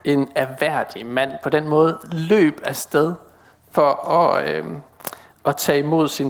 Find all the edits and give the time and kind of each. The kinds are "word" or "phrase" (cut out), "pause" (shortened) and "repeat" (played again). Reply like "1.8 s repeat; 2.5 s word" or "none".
none